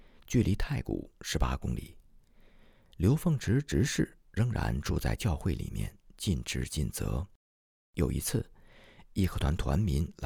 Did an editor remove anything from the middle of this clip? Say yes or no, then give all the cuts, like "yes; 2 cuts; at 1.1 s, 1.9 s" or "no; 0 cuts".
no; 0 cuts